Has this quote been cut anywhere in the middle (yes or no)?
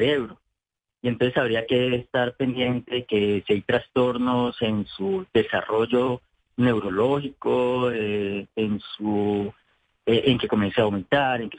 no